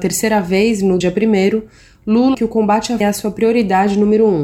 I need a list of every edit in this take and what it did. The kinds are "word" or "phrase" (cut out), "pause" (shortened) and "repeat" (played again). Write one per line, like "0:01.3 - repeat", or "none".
0:01.0 - word
0:02.3 - word
0:03.0 - word